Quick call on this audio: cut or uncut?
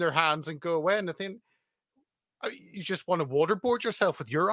uncut